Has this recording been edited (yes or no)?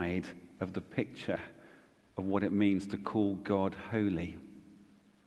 no